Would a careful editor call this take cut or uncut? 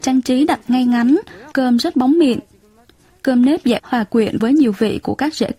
cut